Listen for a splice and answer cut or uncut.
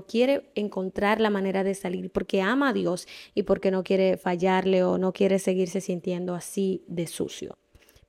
uncut